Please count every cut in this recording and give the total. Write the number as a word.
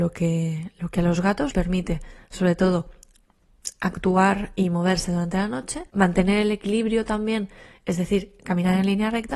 two